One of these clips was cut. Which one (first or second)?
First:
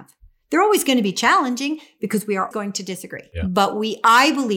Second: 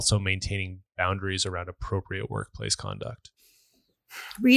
first